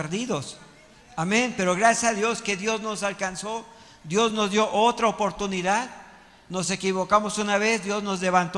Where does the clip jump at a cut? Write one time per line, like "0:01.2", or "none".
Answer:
none